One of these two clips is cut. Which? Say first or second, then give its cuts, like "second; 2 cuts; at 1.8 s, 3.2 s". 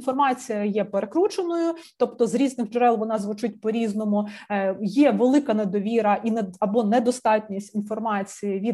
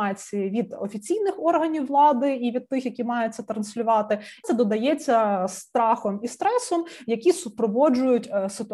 second; 1 cut; at 4.4 s